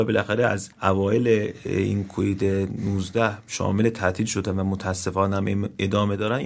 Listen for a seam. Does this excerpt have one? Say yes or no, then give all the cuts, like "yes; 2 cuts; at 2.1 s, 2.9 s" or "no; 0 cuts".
no; 0 cuts